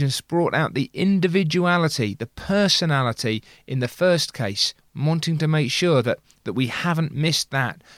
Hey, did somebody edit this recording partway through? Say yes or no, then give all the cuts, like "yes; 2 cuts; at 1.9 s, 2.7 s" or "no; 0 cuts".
no; 0 cuts